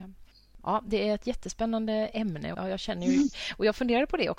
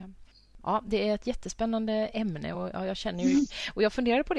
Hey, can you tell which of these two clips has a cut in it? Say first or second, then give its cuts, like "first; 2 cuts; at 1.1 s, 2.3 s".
first; 1 cut; at 2.5 s